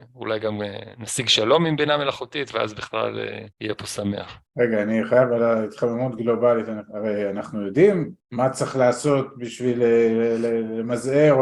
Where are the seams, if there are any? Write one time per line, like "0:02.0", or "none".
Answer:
0:03.5
0:04.5
0:08.2